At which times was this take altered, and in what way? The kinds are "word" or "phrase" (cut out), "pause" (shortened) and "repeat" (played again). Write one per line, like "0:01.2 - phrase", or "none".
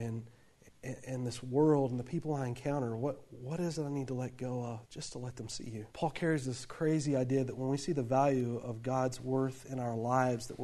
0:04.8 - pause
0:05.9 - pause